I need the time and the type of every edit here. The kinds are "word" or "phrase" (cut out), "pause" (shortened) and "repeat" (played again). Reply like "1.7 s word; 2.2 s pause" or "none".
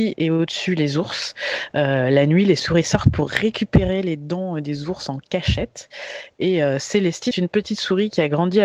7.3 s word